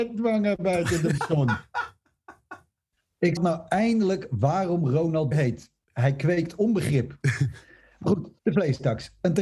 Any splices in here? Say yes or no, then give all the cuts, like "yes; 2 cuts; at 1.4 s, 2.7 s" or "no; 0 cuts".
yes; 4 cuts; at 1.2 s, 3.4 s, 5.3 s, 8.4 s